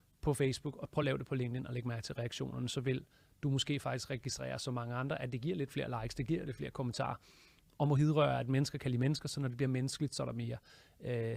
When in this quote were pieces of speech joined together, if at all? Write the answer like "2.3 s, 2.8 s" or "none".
none